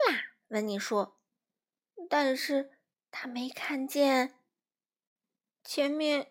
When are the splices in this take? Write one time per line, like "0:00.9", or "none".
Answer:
none